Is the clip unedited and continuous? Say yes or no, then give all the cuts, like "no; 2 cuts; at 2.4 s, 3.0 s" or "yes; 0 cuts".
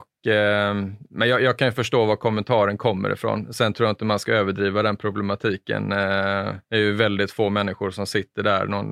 no; 1 cut; at 6.6 s